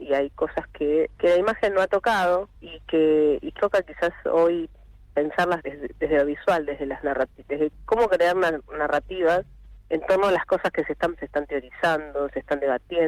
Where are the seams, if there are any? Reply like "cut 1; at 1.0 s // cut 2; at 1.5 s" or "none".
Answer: cut 1; at 1.1 s // cut 2; at 2.6 s // cut 3; at 3.6 s // cut 4; at 5.6 s // cut 5; at 9.8 s // cut 6; at 11.2 s